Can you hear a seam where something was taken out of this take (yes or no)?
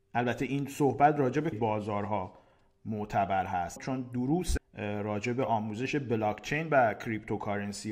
yes